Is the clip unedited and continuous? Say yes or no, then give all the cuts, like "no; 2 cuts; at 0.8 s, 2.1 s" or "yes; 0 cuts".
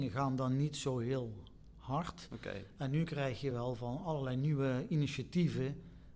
yes; 0 cuts